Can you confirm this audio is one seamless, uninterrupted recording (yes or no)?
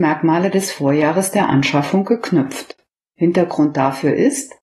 yes